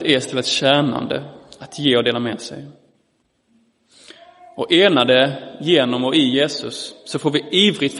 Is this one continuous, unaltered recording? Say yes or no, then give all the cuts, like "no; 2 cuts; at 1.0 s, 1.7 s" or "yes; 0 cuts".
yes; 0 cuts